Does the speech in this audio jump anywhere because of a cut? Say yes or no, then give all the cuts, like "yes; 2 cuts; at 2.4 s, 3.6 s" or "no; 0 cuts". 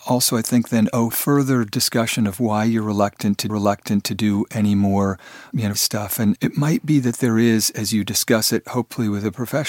yes; 4 cuts; at 1.1 s, 3.5 s, 5.7 s, 6.4 s